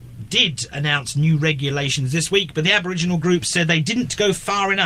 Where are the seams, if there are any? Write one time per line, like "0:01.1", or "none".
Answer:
none